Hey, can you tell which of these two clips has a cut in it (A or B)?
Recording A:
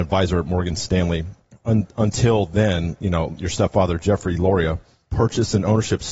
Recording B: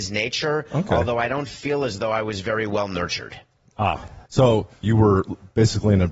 B